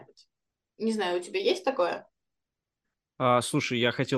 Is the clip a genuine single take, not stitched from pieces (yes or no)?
yes